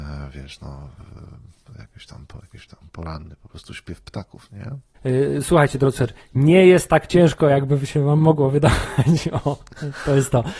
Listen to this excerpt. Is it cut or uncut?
uncut